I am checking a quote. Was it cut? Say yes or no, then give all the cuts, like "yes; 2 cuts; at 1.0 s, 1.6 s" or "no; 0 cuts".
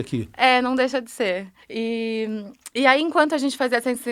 yes; 1 cut; at 1.6 s